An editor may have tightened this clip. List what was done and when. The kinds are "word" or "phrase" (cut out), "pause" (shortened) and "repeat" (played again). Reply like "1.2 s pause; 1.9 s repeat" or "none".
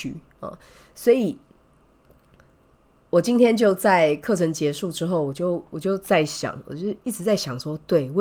none